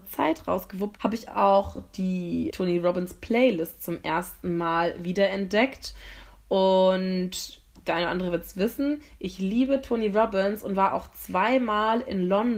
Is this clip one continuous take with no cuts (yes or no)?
no